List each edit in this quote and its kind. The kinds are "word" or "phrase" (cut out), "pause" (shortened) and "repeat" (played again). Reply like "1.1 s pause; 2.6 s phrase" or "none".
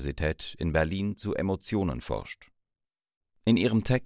none